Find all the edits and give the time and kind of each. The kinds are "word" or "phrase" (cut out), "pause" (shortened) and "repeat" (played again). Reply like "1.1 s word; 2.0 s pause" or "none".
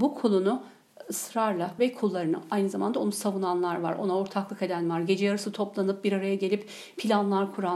1.8 s word